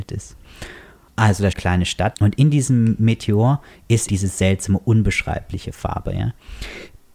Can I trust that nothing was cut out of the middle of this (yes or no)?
no